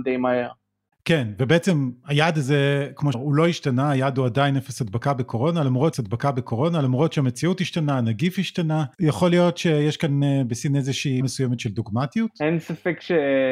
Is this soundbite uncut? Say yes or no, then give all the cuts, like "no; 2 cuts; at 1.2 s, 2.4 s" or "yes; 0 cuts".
no; 4 cuts; at 3.1 s, 5.9 s, 8.9 s, 11.2 s